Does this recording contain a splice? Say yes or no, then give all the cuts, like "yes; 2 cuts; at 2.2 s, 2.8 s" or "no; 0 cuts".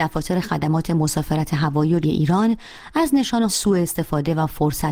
yes; 2 cuts; at 2.0 s, 3.5 s